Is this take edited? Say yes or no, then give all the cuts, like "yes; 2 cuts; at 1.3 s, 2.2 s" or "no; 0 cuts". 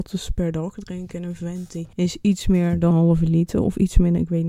yes; 2 cuts; at 1.9 s, 2.9 s